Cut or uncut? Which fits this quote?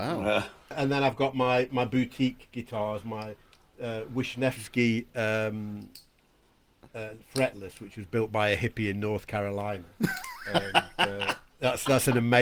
uncut